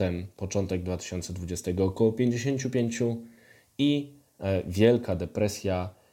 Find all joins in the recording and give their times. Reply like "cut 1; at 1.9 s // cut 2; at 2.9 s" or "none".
none